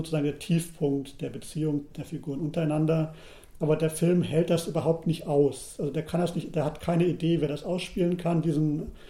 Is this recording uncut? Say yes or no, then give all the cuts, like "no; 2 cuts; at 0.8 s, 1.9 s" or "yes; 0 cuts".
yes; 0 cuts